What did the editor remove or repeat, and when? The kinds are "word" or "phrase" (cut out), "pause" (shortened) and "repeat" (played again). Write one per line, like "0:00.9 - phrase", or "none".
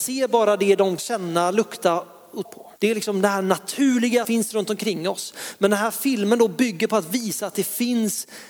0:01.0 - phrase
0:02.4 - word
0:02.8 - pause
0:04.2 - word